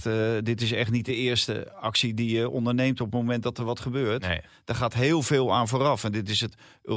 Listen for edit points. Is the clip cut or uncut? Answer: uncut